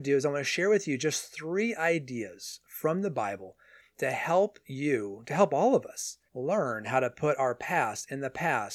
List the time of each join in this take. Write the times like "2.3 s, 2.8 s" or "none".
6.3 s